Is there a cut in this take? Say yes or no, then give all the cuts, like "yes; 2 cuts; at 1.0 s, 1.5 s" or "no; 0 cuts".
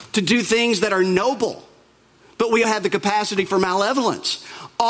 yes; 1 cut; at 2.6 s